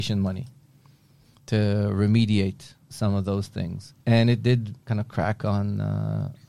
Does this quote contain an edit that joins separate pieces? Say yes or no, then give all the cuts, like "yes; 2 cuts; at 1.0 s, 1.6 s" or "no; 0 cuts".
yes; 3 cuts; at 2.8 s, 4.0 s, 4.8 s